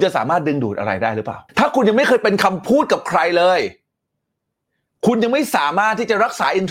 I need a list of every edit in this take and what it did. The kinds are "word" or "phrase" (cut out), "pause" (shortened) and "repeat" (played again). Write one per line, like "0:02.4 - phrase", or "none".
0:01.5 - pause